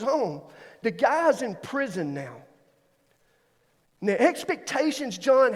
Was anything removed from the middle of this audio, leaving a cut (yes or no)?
no